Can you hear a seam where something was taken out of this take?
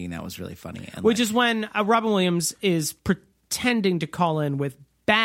no; 0 cuts

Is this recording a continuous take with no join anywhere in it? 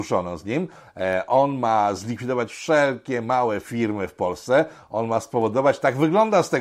yes; 0 cuts

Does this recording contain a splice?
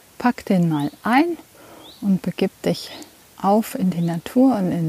no; 0 cuts

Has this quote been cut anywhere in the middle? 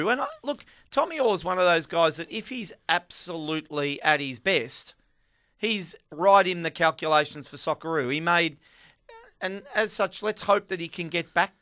no; 0 cuts

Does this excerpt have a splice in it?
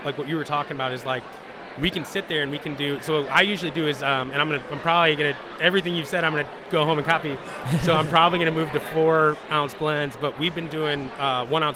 no; 0 cuts

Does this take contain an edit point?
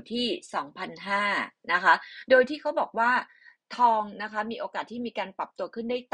no; 0 cuts

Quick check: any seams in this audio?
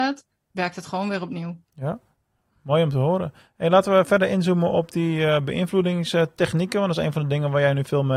yes; 1 cut; at 1.7 s

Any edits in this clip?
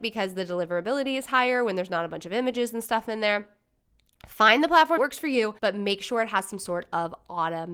yes; 2 cuts; at 5.0 s, 5.6 s

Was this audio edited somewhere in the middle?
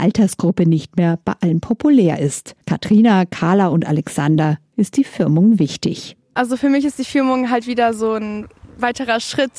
yes; 1 cut; at 2.6 s

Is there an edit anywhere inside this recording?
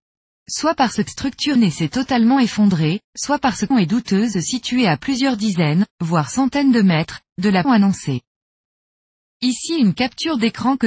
yes; 7 cuts; at 1.1 s, 1.6 s, 3.0 s, 3.7 s, 4.3 s, 5.9 s, 7.6 s

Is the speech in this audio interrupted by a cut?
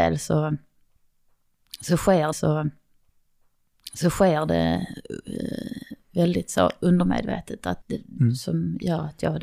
yes; 3 cuts; at 2.3 s, 7.8 s, 8.2 s

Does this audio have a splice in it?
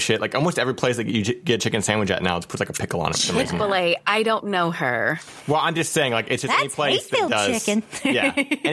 no; 0 cuts

